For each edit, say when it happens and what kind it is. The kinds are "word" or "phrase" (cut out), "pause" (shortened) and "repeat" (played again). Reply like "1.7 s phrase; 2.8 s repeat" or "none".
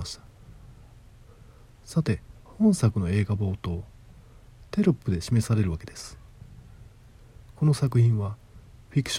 2.4 s pause